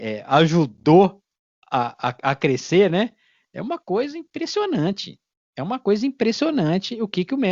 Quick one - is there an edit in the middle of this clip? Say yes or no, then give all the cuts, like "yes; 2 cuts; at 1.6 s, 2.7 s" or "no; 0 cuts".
no; 0 cuts